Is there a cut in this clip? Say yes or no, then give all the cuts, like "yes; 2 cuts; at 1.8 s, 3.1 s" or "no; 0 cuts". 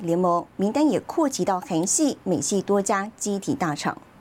no; 0 cuts